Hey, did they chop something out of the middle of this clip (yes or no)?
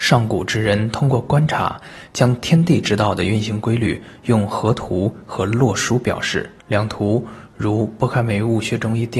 yes